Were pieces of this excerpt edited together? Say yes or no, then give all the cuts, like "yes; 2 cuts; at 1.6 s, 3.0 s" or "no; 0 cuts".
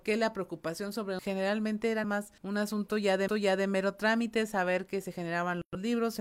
yes; 4 cuts; at 1.2 s, 2.0 s, 2.4 s, 3.3 s